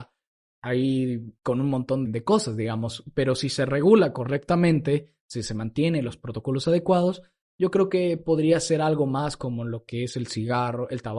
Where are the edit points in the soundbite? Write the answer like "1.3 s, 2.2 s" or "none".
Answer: 1.4 s, 2.0 s